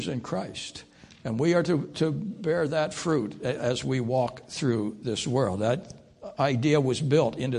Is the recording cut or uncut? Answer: uncut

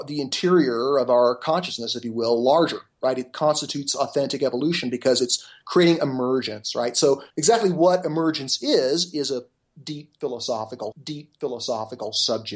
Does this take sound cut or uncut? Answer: cut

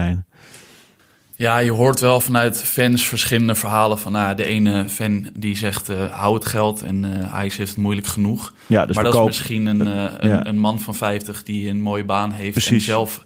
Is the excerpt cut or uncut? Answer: uncut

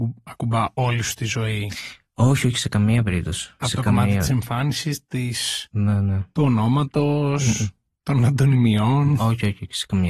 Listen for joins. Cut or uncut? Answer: uncut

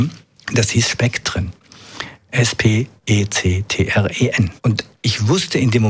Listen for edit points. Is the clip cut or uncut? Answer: cut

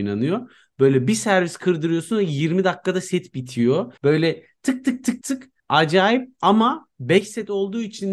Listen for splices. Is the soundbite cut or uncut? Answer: cut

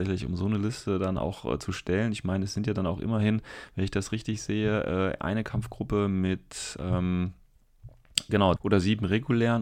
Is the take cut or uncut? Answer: cut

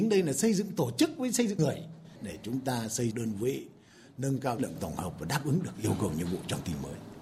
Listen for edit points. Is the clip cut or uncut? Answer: cut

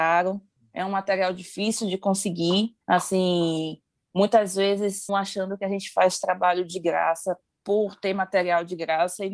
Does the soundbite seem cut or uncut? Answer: cut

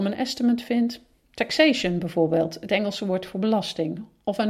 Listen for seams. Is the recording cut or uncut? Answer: uncut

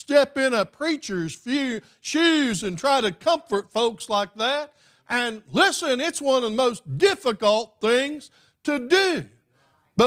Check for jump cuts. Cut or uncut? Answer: uncut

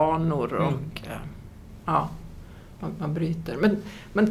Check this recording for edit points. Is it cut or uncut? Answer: uncut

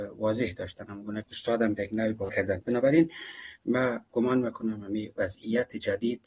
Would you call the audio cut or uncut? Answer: cut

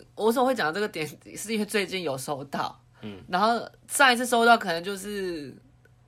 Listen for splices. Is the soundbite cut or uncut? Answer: uncut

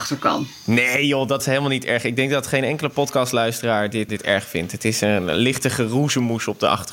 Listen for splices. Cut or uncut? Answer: cut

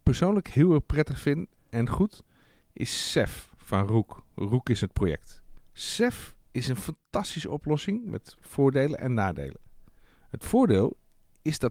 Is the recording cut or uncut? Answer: cut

